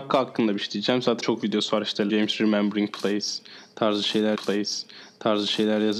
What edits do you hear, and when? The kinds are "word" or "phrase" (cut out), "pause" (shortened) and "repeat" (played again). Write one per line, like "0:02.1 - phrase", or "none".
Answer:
0:01.2 - phrase
0:02.1 - word
0:04.4 - repeat